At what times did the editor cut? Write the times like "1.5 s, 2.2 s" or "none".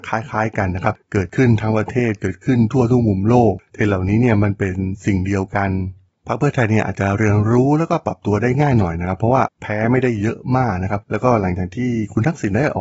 none

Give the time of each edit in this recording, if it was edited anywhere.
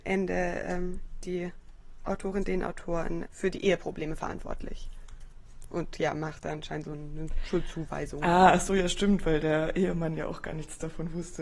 3.3 s

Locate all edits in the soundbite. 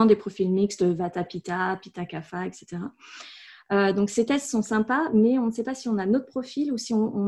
none

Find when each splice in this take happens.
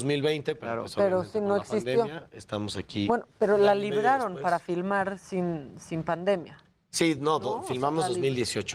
none

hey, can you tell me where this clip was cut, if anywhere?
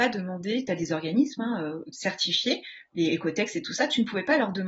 1.9 s

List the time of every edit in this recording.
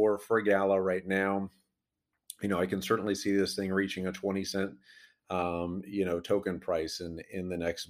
none

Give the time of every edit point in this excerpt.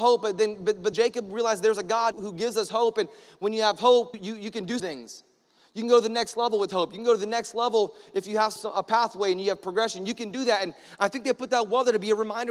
0.9 s, 2.1 s, 4.1 s, 4.8 s, 8.6 s

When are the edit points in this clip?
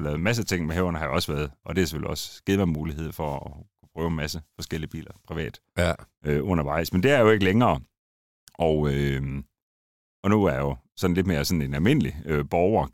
1.6 s

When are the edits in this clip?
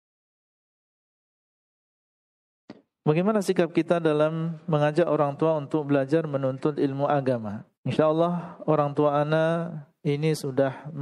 7.8 s

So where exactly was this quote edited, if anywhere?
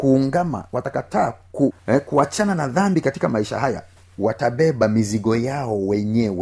1.8 s

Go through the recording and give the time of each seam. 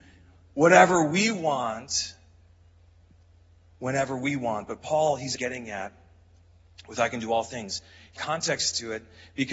5.4 s, 8.2 s

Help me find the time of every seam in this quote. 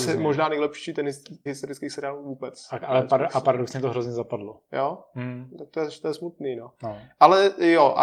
1.5 s

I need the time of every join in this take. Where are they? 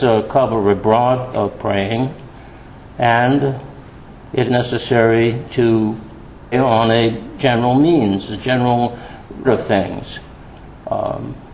1.3 s, 4.5 s, 6.5 s, 7.4 s, 9.4 s

